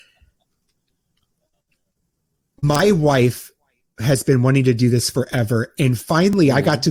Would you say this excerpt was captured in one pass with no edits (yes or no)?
yes